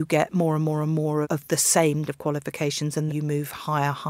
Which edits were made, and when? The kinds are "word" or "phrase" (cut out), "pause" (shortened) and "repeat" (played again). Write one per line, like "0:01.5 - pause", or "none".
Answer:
0:01.2 - word
0:02.1 - word
0:03.1 - word